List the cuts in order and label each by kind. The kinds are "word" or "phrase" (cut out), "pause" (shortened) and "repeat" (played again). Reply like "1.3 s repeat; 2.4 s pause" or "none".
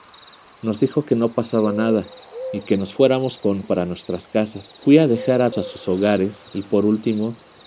3.6 s word; 4.8 s pause; 5.5 s word; 6.5 s pause